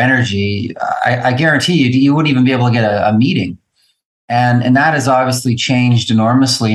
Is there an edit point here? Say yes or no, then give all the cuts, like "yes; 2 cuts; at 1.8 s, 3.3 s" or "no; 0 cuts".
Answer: no; 0 cuts